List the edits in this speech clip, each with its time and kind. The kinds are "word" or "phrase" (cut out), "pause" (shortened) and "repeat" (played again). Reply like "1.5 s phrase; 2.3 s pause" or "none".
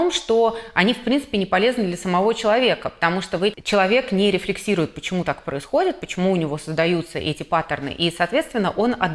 3.5 s word